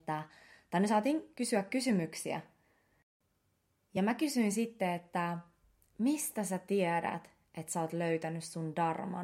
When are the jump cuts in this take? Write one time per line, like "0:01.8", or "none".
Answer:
none